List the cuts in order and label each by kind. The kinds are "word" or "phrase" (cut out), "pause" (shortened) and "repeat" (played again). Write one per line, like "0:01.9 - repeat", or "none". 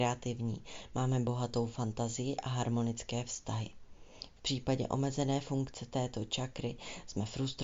none